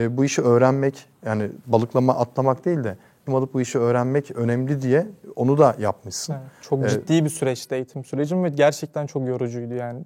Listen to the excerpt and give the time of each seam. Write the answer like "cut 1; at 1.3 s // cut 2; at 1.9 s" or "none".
cut 1; at 3.3 s

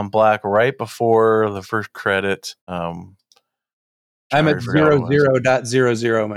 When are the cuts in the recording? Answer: cut 1; at 1.6 s // cut 2; at 2.6 s

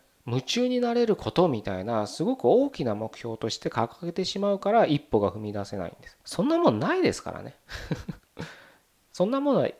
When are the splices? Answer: cut 1; at 6.2 s // cut 2; at 8.2 s

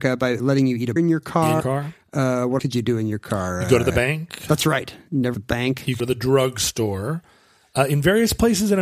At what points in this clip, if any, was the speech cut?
cut 1; at 1.0 s // cut 2; at 1.6 s // cut 3; at 2.6 s // cut 4; at 5.3 s // cut 5; at 6.0 s

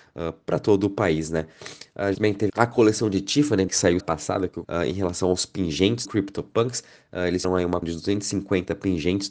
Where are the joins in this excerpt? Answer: cut 1; at 2.1 s // cut 2; at 2.5 s // cut 3; at 3.7 s // cut 4; at 4.0 s // cut 5; at 4.6 s // cut 6; at 6.0 s // cut 7; at 7.4 s // cut 8; at 7.8 s

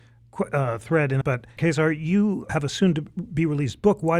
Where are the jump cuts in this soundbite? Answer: cut 1; at 1.2 s // cut 2; at 1.6 s // cut 3; at 2.5 s

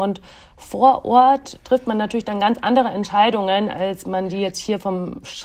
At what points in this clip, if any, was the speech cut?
cut 1; at 1.6 s

